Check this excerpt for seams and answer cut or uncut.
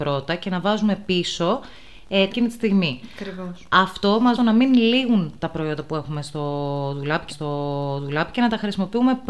cut